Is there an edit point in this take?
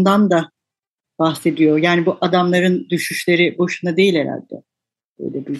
no; 0 cuts

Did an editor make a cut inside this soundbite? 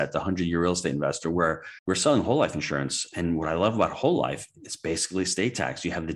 yes; 1 cut; at 1.8 s

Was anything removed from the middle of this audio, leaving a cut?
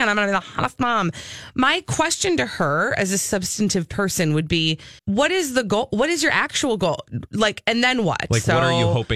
yes; 1 cut; at 5.0 s

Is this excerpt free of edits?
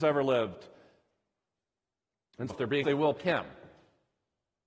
no; 3 cuts; at 2.5 s, 2.8 s, 3.2 s

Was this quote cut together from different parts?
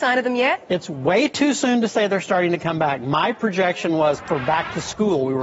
no; 0 cuts

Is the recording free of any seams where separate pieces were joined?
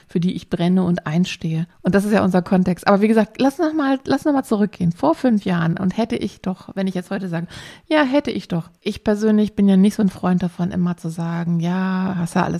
no; 2 cuts; at 1.7 s, 8.8 s

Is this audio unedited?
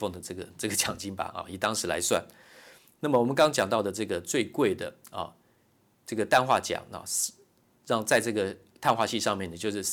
yes; 0 cuts

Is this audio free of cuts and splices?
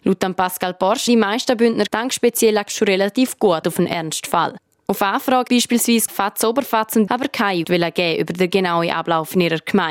no; 8 cuts; at 1.1 s, 1.9 s, 2.7 s, 3.6 s, 5.5 s, 6.1 s, 7.1 s, 7.6 s

